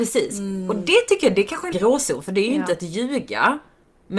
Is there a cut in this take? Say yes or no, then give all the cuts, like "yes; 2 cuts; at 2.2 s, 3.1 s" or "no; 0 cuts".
yes; 1 cut; at 1.7 s